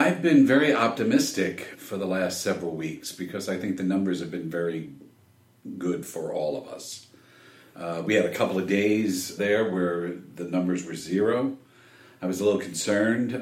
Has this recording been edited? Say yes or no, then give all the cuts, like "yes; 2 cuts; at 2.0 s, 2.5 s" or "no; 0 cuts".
yes; 2 cuts; at 1.7 s, 9.4 s